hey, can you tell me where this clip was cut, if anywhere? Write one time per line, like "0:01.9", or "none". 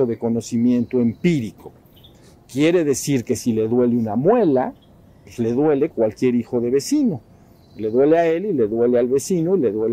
0:05.9